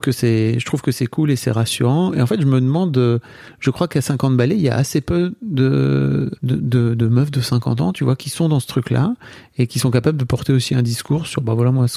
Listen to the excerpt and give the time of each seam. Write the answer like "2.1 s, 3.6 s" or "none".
6.4 s